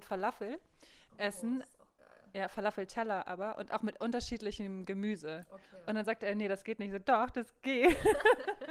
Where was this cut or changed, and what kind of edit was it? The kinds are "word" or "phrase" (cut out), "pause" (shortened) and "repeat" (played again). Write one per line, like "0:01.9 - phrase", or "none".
none